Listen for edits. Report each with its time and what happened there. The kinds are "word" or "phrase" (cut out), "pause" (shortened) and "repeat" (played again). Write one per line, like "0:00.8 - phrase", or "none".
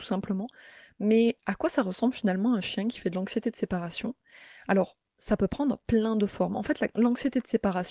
none